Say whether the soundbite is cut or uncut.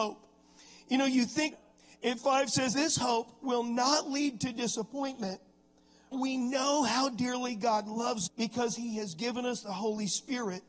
cut